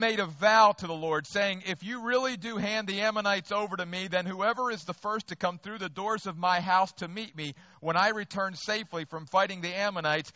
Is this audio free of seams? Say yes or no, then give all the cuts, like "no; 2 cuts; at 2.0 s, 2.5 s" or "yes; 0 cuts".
yes; 0 cuts